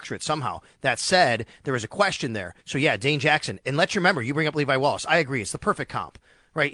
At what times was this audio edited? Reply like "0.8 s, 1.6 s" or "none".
2.6 s

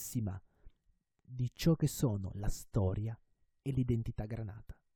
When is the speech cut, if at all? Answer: none

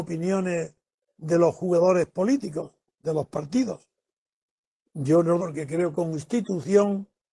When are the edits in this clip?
5.4 s, 5.9 s

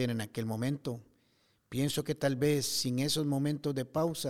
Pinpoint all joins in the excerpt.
none

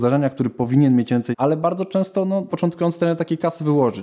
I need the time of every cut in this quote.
1.3 s, 2.5 s

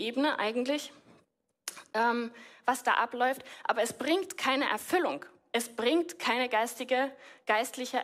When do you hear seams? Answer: none

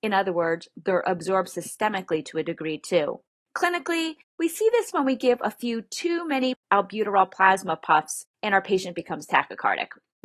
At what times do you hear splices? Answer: none

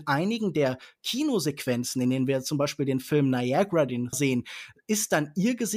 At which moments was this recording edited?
4.1 s

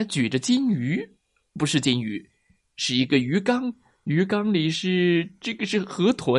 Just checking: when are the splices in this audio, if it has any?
1.5 s

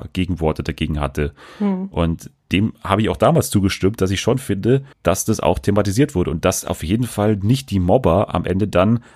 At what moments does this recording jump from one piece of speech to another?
4.9 s

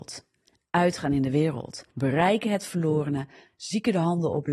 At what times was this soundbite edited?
1.9 s

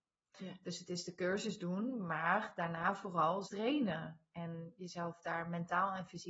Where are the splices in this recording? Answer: 3.5 s

